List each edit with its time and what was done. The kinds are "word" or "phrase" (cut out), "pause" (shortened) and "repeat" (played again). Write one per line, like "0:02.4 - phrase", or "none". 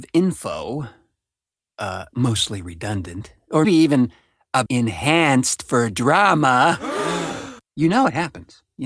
0:03.6 - word
0:04.7 - word
0:07.6 - pause